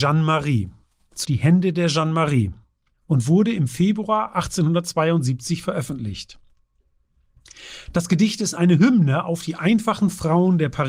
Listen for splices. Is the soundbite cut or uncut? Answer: cut